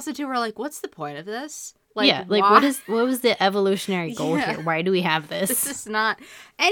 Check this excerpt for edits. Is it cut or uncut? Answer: cut